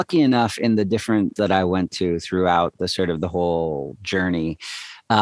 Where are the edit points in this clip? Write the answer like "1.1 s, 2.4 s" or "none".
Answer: 1.4 s